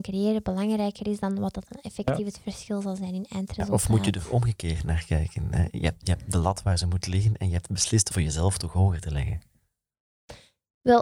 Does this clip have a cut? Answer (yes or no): yes